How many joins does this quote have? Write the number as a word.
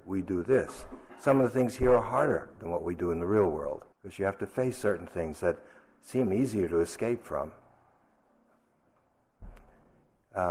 one